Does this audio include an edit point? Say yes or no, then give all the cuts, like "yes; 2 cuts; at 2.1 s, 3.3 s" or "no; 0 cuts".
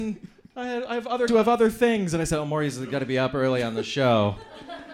yes; 1 cut; at 1.3 s